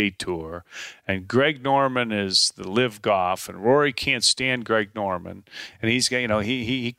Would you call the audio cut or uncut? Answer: uncut